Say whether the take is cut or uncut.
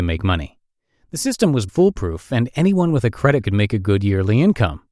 cut